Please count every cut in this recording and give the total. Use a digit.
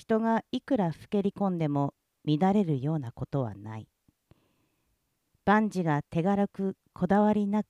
0